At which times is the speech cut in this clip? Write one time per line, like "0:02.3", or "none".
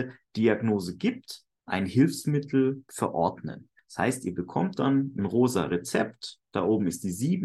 none